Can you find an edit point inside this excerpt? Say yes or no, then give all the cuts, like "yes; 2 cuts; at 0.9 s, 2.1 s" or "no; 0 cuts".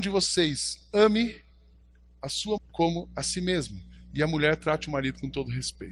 yes; 1 cut; at 2.6 s